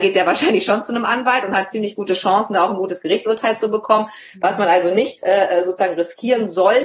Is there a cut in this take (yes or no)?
no